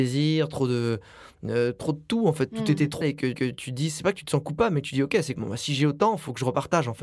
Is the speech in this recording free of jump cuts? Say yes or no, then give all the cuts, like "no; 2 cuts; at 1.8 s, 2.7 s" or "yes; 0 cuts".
no; 3 cuts; at 3.0 s, 3.3 s, 5.4 s